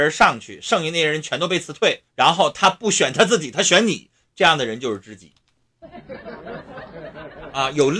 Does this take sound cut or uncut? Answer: cut